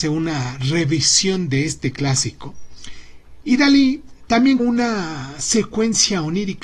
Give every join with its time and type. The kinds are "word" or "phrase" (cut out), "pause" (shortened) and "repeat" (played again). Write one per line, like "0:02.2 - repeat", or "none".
0:04.6 - word